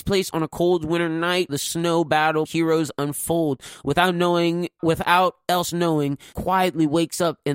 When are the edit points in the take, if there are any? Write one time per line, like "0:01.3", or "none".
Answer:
0:01.5
0:02.4
0:04.8
0:06.3